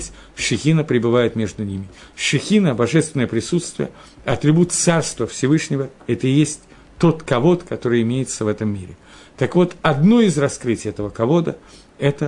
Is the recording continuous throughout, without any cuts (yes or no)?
yes